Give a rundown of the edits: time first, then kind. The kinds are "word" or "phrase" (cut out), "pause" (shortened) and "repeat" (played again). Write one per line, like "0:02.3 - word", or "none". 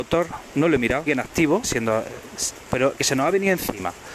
0:01.1 - word
0:01.6 - word
0:02.9 - word